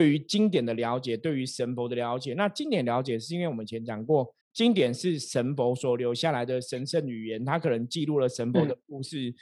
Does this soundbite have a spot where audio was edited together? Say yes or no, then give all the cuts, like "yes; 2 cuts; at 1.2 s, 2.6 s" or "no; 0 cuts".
yes; 1 cut; at 4.4 s